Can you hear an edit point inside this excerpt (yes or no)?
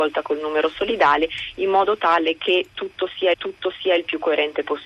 yes